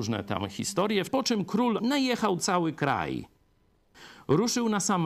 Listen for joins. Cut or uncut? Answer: cut